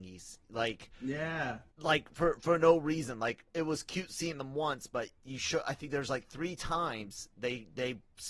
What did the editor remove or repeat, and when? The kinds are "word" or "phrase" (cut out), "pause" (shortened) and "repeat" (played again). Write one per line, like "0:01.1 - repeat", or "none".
0:01.7 - pause